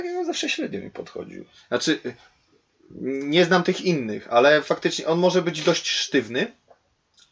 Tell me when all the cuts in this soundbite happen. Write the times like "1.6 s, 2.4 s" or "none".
none